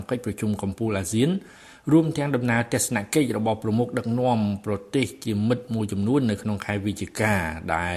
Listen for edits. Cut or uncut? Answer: uncut